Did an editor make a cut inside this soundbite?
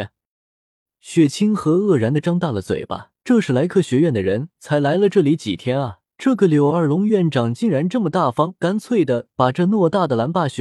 yes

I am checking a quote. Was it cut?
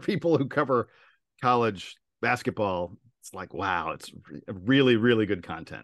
no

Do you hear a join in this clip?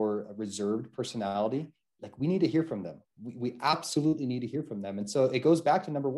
no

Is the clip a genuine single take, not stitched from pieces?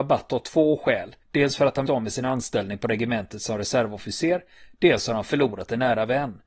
no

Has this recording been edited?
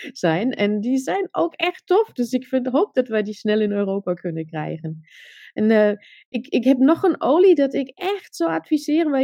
no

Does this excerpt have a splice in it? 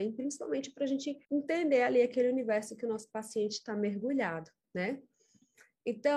yes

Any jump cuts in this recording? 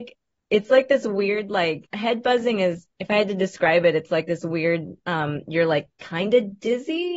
yes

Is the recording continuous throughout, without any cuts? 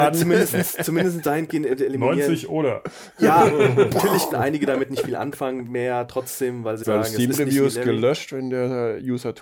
no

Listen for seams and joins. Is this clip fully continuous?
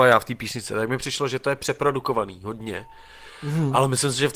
yes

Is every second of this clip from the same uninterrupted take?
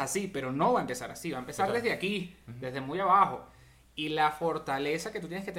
yes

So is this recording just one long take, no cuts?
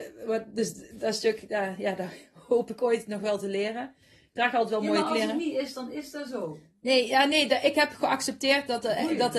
yes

